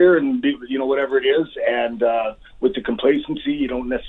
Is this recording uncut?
yes; 0 cuts

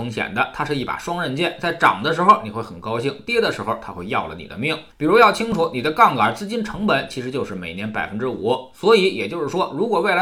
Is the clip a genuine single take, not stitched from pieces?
no; 1 cut; at 4.9 s

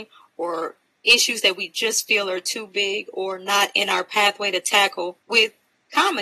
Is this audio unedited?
no; 1 cut; at 5.2 s

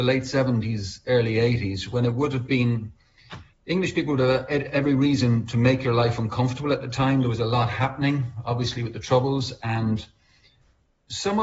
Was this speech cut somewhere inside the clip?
yes; 1 cut; at 3.5 s

